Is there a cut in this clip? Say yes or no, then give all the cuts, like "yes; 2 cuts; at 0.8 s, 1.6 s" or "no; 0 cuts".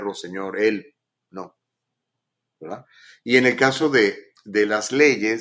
no; 0 cuts